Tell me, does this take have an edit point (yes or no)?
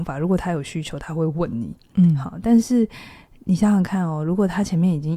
no